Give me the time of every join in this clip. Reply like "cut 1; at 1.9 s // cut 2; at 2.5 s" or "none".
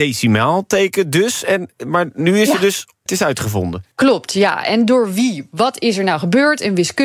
cut 1; at 3.1 s // cut 2; at 3.9 s